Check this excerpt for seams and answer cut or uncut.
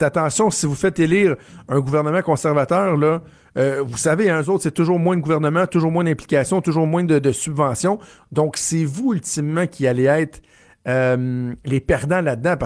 uncut